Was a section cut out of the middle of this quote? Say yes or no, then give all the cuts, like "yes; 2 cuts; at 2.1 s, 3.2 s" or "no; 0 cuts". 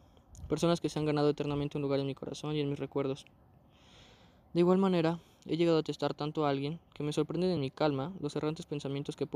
no; 0 cuts